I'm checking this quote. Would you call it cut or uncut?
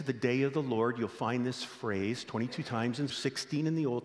cut